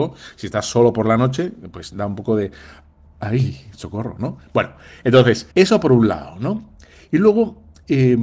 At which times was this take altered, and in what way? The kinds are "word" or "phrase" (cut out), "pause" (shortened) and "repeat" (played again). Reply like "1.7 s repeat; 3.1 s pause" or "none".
5.5 s pause